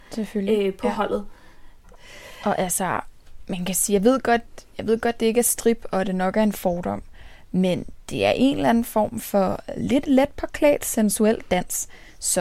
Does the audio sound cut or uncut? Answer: uncut